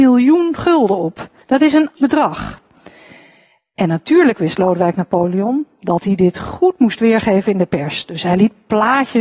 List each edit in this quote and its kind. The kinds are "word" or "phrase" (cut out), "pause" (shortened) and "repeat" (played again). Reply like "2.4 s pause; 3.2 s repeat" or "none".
1.4 s pause; 2.0 s word

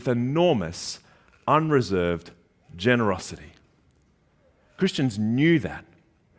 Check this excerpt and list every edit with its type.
none

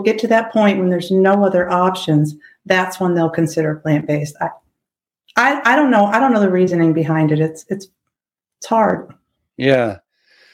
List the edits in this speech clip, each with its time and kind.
none

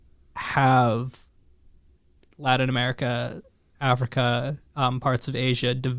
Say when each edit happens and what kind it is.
none

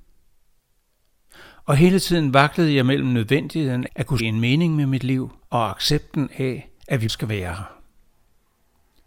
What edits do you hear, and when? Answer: 3.9 s word; 4.2 s word; 5.4 s pause; 6.8 s pause; 7.1 s word

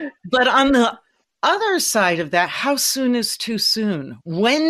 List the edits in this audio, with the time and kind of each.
none

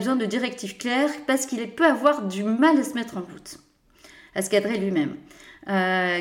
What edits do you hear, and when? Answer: none

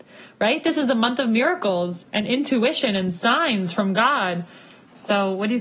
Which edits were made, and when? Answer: 2.1 s pause

